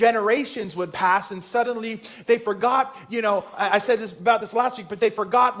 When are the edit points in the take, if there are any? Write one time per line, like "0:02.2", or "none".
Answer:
none

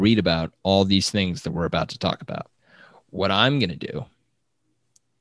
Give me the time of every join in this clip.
none

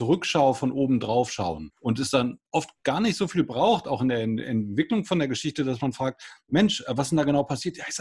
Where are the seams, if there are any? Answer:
0:01.8

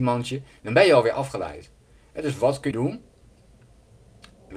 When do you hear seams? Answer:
0:02.7

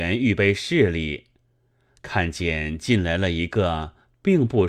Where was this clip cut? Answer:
none

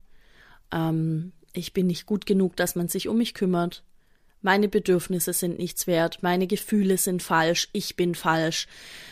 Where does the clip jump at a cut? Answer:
none

